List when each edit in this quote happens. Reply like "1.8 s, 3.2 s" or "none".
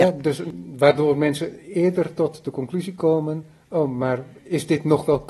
none